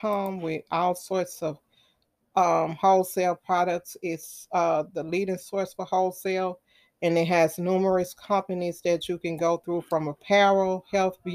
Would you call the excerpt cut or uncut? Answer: uncut